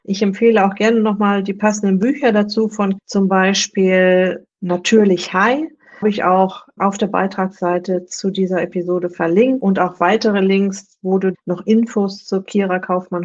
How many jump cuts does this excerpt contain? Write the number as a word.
four